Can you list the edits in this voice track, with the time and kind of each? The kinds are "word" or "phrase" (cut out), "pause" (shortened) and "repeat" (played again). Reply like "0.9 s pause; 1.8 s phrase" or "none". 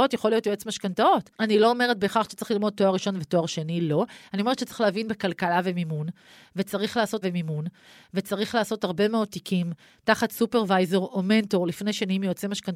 7.2 s repeat